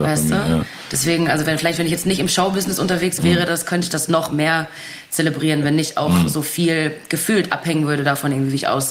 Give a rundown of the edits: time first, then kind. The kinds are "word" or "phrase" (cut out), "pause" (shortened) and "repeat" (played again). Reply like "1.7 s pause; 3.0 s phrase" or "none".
3.2 s word